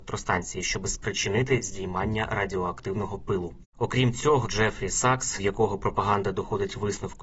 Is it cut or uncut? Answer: cut